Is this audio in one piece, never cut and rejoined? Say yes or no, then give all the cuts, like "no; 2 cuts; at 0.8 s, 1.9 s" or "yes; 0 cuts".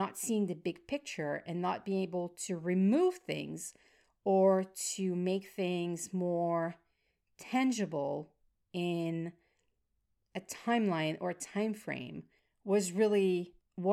yes; 0 cuts